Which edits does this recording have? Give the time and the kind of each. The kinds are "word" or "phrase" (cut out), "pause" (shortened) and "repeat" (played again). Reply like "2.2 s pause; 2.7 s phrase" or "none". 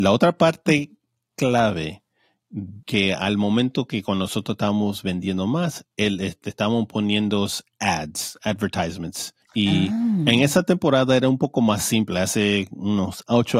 2.8 s pause; 9.4 s pause